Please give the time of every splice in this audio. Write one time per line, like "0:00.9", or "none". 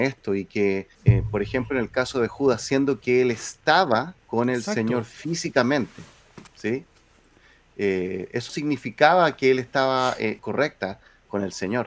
0:00.9
0:04.2
0:06.5
0:08.5
0:10.4